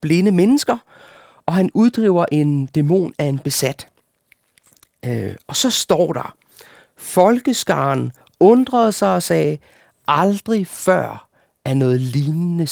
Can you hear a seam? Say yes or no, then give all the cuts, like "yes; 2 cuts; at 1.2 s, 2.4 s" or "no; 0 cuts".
no; 0 cuts